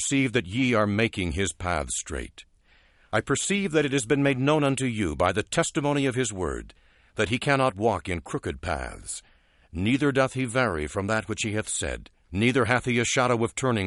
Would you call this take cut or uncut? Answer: uncut